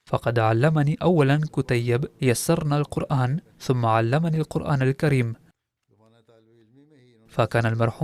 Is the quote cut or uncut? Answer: cut